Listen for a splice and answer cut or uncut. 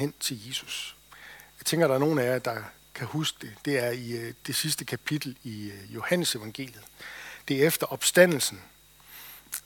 uncut